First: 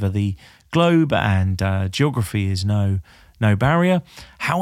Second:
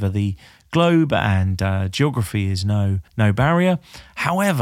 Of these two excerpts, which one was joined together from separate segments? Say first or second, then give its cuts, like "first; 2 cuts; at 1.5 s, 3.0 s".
second; 1 cut; at 3.1 s